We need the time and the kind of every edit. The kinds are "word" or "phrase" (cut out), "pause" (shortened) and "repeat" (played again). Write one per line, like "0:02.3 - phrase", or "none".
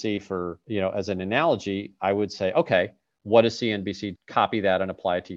0:04.2 - word